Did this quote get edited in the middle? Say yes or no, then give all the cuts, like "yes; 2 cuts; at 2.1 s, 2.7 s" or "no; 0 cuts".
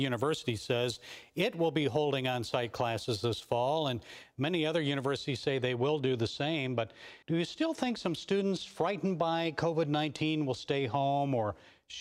yes; 1 cut; at 7.2 s